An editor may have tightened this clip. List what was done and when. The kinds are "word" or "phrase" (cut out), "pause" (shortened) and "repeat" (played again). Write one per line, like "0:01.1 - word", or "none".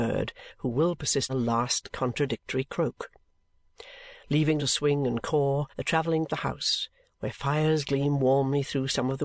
0:01.3 - phrase
0:04.6 - word
0:05.7 - pause
0:06.3 - phrase